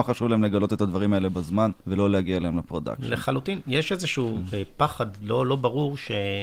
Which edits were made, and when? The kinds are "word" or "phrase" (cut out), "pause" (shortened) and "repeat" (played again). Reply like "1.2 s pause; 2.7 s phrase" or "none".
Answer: 1.8 s pause